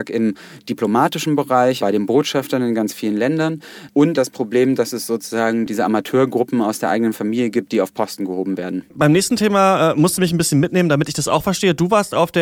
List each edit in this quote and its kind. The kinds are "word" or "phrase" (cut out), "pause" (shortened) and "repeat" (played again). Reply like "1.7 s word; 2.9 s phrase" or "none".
1.8 s word; 4.2 s word